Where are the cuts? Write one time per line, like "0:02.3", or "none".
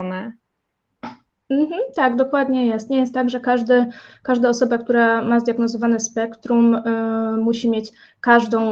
none

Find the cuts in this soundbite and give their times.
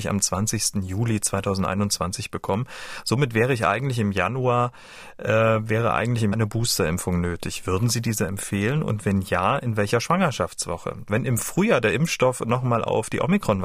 0:06.3

